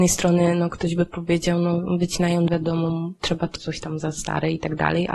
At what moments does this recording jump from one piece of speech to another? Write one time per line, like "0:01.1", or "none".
0:02.5
0:03.6
0:04.0